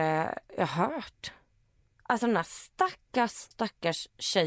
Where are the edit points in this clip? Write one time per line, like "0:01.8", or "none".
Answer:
0:03.5